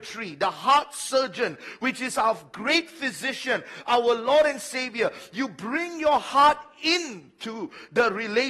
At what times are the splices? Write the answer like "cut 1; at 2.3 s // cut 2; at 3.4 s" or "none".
none